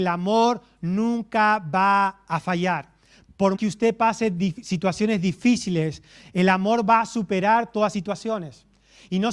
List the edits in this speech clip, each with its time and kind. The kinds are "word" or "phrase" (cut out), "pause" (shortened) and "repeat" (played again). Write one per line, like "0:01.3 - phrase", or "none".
0:03.5 - word
0:07.9 - word